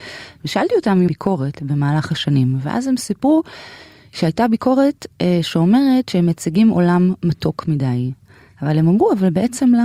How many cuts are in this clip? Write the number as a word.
one